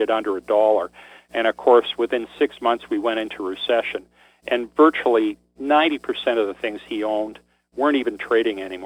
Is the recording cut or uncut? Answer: uncut